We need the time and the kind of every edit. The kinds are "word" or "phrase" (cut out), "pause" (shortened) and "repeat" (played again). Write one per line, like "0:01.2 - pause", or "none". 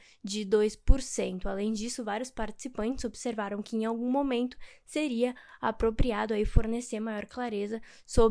none